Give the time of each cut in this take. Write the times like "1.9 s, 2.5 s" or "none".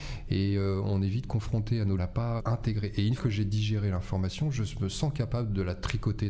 2.0 s, 2.4 s, 3.2 s